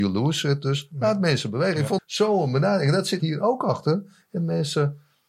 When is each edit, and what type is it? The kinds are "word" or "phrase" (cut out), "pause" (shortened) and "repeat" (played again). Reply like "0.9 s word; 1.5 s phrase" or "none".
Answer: 2.0 s word; 3.2 s word

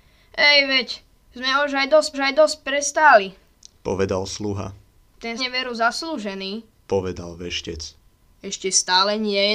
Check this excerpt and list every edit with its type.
2.1 s repeat; 5.4 s phrase; 6.7 s phrase

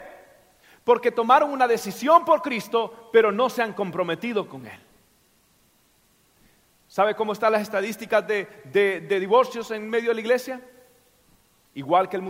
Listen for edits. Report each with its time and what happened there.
none

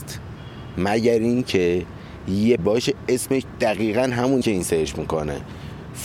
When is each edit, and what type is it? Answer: 2.6 s word; 4.4 s word

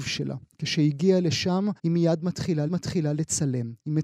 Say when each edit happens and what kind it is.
1.8 s pause; 2.7 s repeat

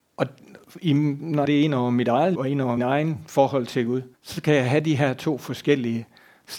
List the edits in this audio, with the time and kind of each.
1.4 s phrase; 2.3 s word; 2.8 s word; 4.1 s pause

